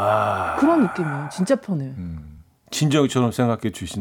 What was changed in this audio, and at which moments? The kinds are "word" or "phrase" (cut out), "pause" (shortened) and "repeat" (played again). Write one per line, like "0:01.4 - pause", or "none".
none